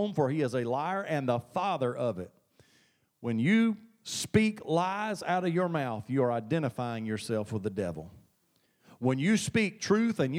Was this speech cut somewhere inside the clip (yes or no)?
no